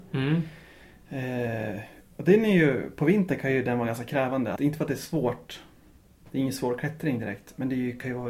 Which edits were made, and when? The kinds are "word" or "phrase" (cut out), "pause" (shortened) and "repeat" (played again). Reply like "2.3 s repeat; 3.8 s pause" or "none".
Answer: 4.6 s phrase